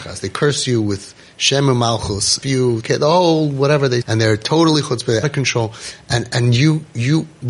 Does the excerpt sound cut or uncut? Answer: cut